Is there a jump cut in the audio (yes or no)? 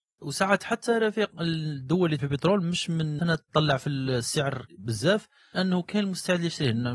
yes